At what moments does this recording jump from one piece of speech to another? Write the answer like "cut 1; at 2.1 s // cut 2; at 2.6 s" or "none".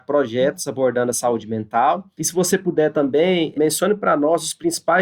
none